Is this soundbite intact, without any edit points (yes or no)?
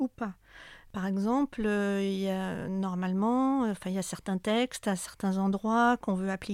yes